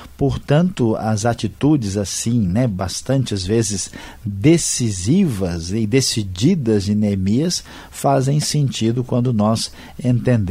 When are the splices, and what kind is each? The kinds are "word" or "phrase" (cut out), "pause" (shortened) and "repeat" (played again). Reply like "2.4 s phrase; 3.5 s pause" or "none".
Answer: none

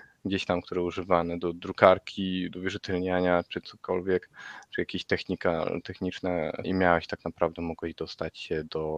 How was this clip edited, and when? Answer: 6.6 s word

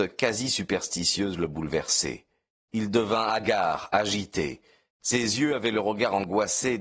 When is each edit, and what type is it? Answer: none

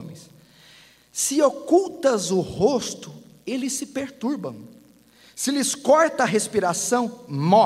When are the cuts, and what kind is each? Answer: none

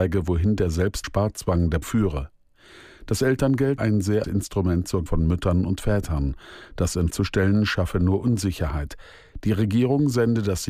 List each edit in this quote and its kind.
1.0 s word; 1.8 s word; 3.8 s word; 4.2 s word; 5.1 s word; 7.1 s word

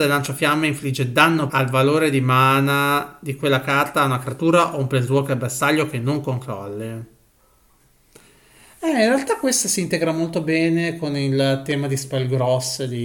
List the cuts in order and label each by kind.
1.5 s word

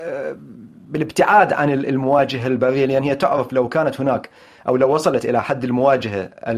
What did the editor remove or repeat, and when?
none

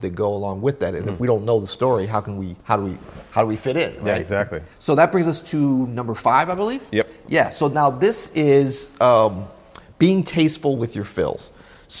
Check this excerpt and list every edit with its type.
2.6 s pause; 4.7 s pause

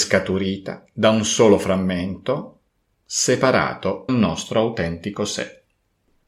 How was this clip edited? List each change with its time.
4.1 s word

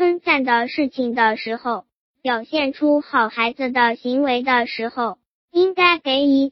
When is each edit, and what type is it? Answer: none

